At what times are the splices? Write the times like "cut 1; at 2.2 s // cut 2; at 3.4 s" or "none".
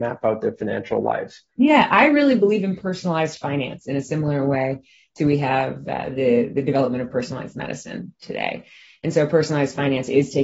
cut 1; at 1.5 s